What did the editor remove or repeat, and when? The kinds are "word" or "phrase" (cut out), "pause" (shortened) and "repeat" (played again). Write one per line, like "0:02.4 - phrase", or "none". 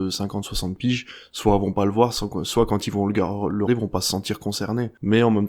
0:03.7 - word

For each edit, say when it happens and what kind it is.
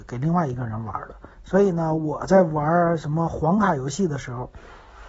0:01.3 - pause

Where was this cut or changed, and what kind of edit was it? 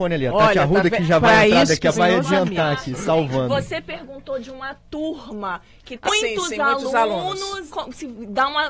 0:01.9 - word
0:06.1 - word
0:07.7 - word

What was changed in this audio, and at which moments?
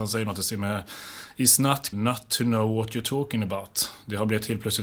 0:01.9 - word

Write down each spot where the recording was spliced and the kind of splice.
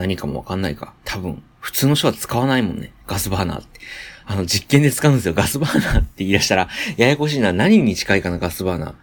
0:01.0 - pause
0:03.0 - pause

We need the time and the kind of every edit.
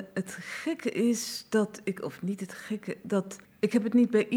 0:03.4 - pause

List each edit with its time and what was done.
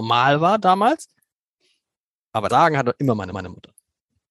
0:02.5 - word
0:03.3 - repeat

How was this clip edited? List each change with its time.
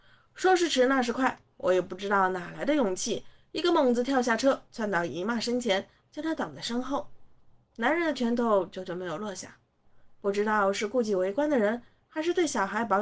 none

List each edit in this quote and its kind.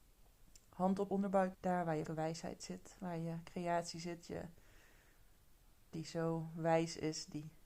0:01.1 - word
0:01.5 - word
0:02.1 - word
0:05.9 - word

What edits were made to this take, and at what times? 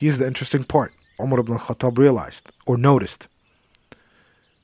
0:01.2 - word
0:02.6 - pause

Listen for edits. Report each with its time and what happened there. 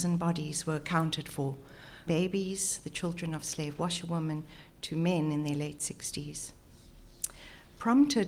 0:02.1 - word

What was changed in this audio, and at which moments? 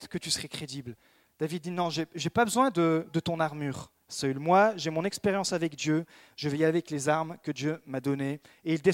0:04.0 - pause

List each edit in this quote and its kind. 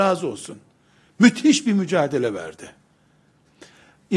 none

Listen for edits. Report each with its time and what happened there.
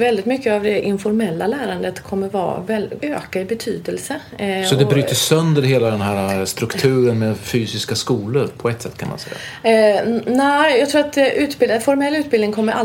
0:03.0 - word

